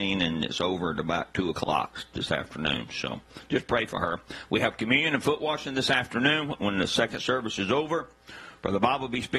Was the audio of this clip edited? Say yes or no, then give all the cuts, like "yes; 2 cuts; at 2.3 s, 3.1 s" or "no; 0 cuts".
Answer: no; 0 cuts